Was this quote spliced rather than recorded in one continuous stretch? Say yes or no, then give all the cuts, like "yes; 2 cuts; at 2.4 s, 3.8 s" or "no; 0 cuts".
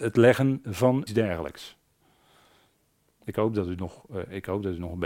yes; 1 cut; at 1.1 s